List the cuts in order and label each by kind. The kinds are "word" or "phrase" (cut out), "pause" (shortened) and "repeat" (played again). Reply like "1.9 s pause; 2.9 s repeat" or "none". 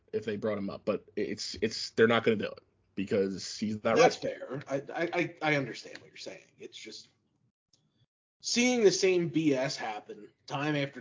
none

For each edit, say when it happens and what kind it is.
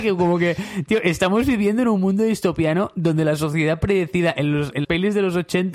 4.8 s word

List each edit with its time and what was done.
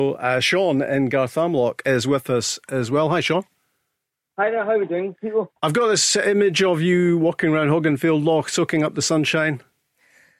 5.6 s pause

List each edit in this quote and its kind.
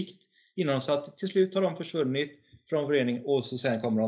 none

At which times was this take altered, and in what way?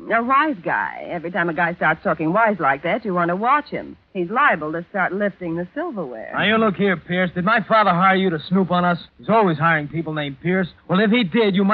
4.0 s pause; 9.1 s pause; 10.8 s pause

